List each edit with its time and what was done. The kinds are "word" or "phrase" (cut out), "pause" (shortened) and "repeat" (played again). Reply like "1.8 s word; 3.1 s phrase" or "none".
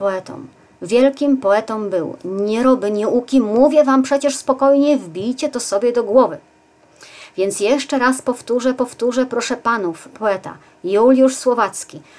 8.8 s repeat; 10.1 s word